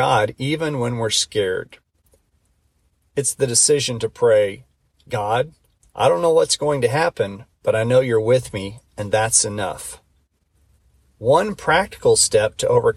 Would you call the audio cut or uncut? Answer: uncut